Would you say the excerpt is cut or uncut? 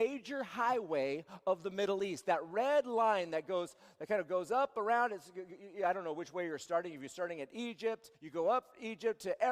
cut